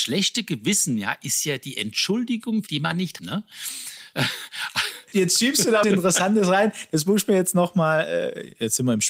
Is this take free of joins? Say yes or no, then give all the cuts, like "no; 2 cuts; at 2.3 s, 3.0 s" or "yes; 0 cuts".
no; 4 cuts; at 2.7 s, 3.2 s, 5.1 s, 5.8 s